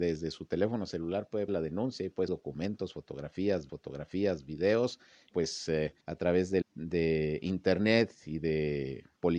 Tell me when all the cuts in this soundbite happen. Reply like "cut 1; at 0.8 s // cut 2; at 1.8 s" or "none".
cut 1; at 1.5 s // cut 2; at 2.3 s // cut 3; at 3.7 s // cut 4; at 5.3 s // cut 5; at 6.0 s // cut 6; at 6.6 s